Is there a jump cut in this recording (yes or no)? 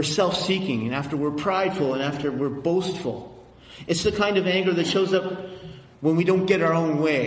no